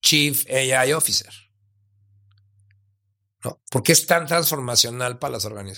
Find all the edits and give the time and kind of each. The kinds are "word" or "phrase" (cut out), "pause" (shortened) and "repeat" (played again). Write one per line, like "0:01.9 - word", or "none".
0:03.6 - pause